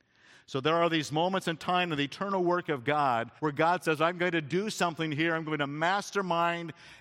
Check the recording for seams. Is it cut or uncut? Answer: cut